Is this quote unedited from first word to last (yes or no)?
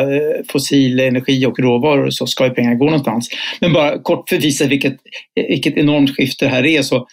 yes